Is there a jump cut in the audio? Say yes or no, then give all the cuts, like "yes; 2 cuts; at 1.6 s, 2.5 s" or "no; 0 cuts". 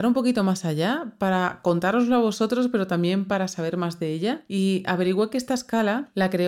no; 0 cuts